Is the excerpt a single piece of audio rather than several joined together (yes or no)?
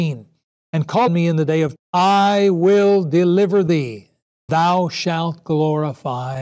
no